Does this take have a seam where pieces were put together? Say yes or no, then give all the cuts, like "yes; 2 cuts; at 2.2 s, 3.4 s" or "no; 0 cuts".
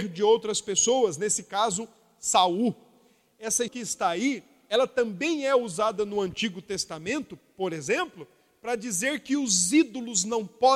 yes; 1 cut; at 3.7 s